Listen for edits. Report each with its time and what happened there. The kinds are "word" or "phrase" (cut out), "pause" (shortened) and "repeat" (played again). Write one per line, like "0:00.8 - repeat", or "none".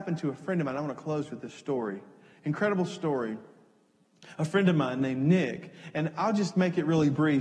none